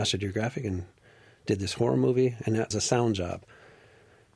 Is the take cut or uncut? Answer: cut